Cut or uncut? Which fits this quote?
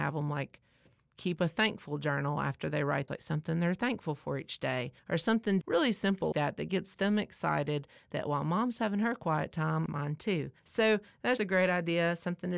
cut